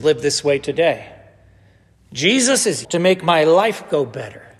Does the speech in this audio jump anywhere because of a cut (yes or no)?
yes